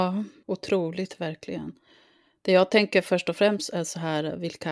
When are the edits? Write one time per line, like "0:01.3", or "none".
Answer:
none

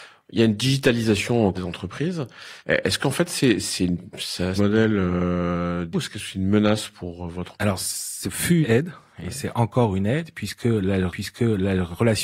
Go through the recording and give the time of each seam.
0:01.5
0:02.6
0:03.6
0:04.6
0:05.9
0:07.5
0:08.6
0:11.1

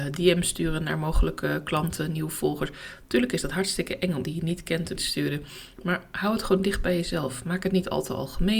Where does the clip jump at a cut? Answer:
0:04.2
0:05.0

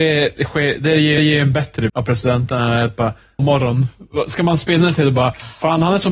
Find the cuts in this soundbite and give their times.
0:01.2
0:01.9
0:03.4

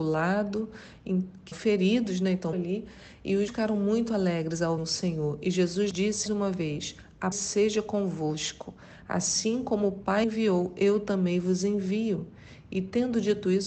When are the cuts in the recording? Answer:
0:01.5
0:02.5
0:03.5
0:04.8
0:05.9
0:06.3
0:07.3
0:10.2

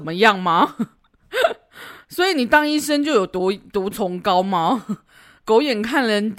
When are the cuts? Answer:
none

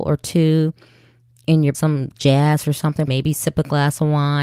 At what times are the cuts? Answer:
0:01.7
0:03.1

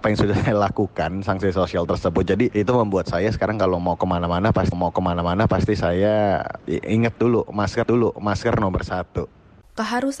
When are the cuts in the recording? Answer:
0:04.7
0:07.8

